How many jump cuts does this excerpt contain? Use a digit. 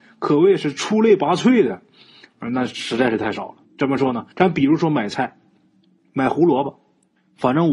2